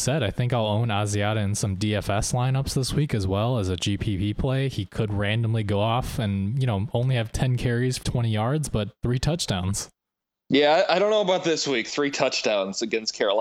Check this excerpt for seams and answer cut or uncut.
cut